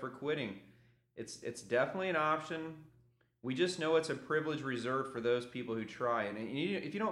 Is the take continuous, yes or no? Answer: yes